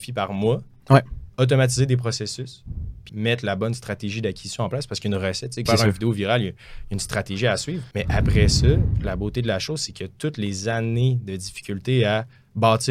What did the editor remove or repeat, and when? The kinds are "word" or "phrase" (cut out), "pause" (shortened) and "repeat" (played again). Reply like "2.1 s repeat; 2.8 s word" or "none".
1.3 s pause; 3.1 s word; 5.7 s phrase; 7.9 s pause